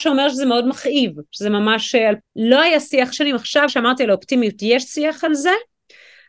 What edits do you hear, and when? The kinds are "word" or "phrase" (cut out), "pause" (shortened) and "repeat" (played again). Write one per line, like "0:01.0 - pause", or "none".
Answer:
0:01.3 - pause
0:02.2 - phrase
0:03.1 - phrase
0:03.7 - word